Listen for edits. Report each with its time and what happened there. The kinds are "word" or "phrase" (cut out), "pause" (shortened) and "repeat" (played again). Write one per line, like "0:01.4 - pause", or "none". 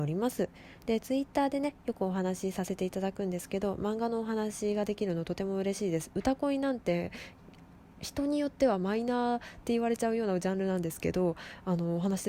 none